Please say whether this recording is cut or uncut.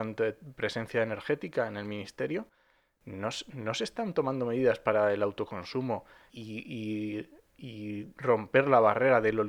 cut